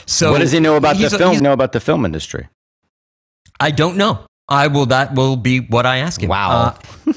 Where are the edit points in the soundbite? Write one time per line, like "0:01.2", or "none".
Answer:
0:01.4